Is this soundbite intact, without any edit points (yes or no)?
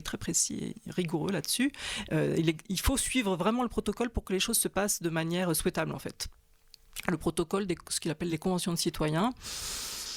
yes